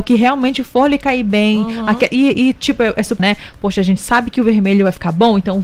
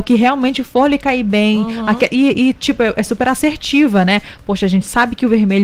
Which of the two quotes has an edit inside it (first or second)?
first